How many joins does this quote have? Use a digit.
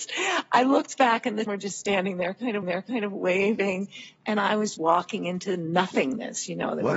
3